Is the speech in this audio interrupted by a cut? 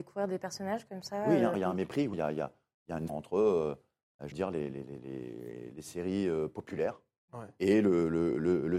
yes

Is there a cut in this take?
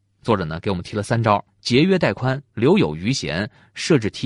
yes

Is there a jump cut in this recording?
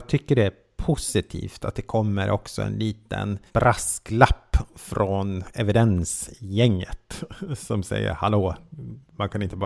yes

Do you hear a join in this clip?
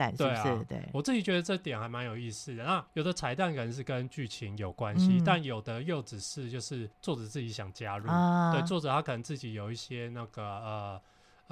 yes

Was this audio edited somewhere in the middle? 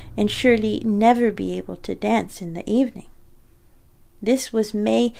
no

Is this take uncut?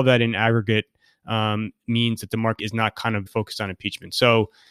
no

